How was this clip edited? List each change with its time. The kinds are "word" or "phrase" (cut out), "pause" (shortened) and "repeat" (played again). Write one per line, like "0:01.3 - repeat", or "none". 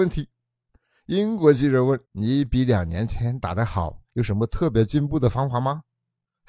0:02.0 - pause
0:04.0 - pause